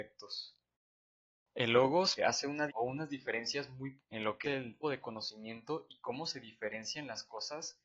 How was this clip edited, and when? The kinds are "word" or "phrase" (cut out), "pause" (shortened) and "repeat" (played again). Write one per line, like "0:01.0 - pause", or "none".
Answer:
0:02.2 - word
0:02.7 - word
0:04.0 - word
0:04.4 - word
0:04.8 - word